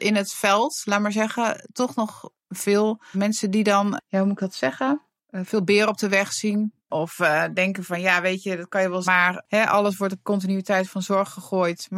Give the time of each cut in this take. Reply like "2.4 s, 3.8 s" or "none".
3.1 s, 6.8 s, 9.0 s